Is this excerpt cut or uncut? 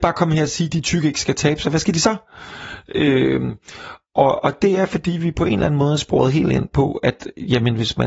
uncut